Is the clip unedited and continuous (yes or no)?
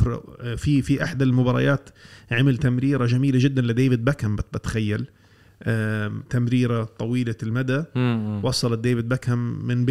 yes